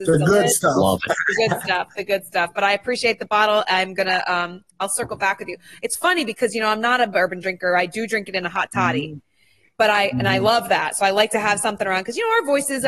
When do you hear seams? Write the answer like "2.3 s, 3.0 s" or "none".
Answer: none